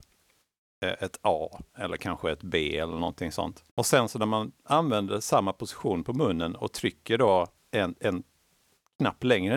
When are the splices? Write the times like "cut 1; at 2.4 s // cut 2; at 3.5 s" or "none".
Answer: cut 1; at 1.7 s // cut 2; at 3.7 s // cut 3; at 4.6 s // cut 4; at 7.5 s